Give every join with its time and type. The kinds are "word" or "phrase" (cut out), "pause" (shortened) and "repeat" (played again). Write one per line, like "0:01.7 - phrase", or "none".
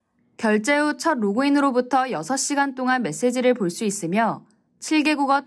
none